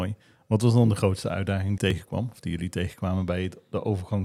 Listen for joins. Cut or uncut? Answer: cut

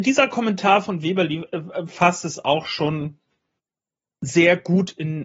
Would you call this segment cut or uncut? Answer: uncut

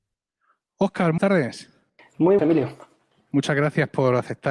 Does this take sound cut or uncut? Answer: cut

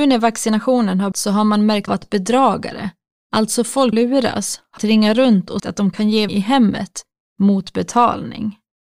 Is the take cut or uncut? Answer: cut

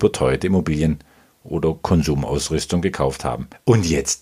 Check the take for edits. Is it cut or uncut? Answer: uncut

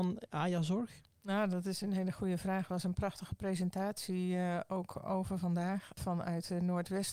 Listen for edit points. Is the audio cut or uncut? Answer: uncut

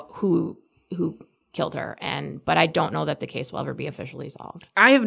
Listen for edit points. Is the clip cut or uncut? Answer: uncut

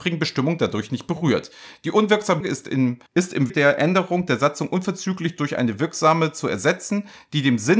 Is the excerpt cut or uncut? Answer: cut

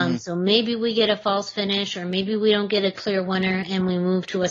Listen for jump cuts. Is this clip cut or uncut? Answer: uncut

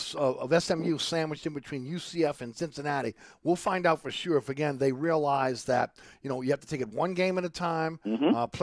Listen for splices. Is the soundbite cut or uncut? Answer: uncut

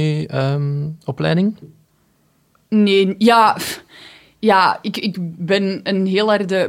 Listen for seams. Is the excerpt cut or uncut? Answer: uncut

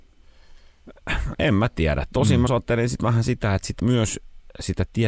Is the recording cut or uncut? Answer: cut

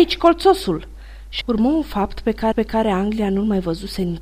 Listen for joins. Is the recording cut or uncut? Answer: cut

